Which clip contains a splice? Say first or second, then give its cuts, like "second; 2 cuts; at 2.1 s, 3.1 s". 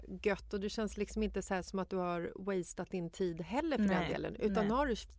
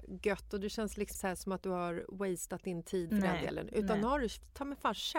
second; 2 cuts; at 1.1 s, 3.1 s